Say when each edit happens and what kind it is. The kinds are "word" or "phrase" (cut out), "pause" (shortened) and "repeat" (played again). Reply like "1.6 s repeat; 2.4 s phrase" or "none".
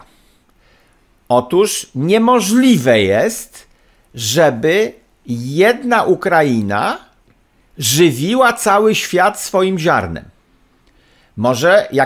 none